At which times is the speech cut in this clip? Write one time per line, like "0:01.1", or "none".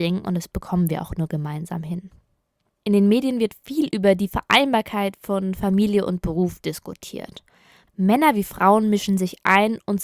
none